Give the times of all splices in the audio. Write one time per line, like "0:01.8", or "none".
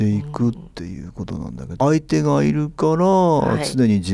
0:01.8